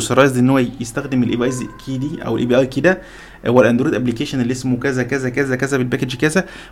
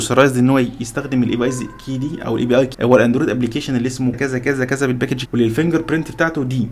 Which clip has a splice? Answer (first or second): second